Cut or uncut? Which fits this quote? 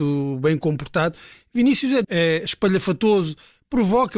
cut